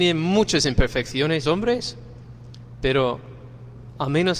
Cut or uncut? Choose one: cut